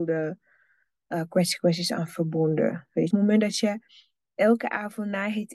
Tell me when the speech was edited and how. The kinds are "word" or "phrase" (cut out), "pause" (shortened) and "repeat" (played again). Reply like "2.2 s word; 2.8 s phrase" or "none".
3.1 s phrase